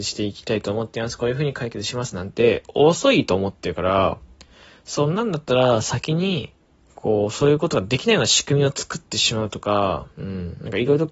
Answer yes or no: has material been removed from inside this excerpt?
yes